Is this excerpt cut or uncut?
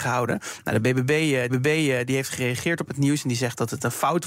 cut